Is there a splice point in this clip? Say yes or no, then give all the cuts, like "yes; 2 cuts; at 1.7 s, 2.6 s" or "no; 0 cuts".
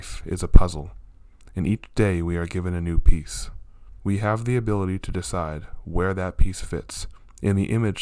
yes; 1 cut; at 4.0 s